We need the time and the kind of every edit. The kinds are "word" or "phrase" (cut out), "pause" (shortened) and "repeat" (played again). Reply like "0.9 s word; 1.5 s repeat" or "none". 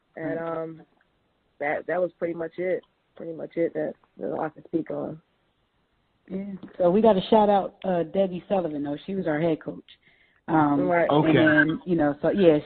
none